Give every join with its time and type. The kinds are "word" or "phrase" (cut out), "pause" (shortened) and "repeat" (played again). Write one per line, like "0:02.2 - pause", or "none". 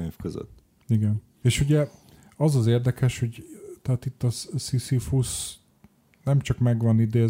none